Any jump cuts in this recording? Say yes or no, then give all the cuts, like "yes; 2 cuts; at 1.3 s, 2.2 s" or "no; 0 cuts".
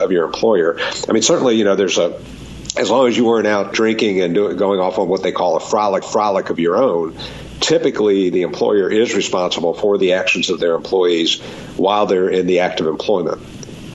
yes; 2 cuts; at 3.7 s, 6.0 s